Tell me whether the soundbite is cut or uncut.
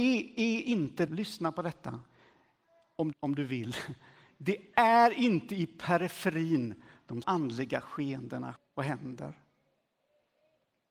cut